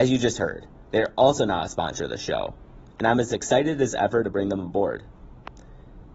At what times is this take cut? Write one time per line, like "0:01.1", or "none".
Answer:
none